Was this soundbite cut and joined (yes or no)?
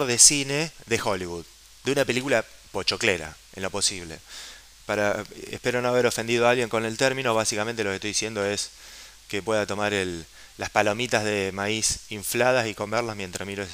no